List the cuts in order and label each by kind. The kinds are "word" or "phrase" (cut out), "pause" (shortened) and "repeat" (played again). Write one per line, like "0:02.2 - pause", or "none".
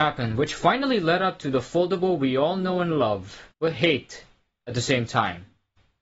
0:03.5 - pause